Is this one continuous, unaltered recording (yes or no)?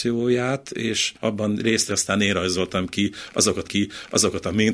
no